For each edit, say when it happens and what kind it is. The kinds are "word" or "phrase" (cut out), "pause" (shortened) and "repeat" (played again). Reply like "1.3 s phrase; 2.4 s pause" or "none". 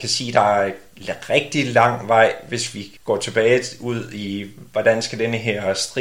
3.0 s pause